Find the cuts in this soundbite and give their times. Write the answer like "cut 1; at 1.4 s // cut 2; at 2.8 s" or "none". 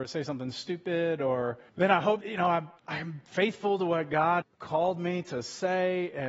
cut 1; at 1.7 s // cut 2; at 2.2 s // cut 3; at 2.8 s // cut 4; at 4.4 s